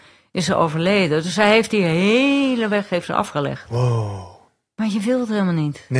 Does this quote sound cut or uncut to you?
uncut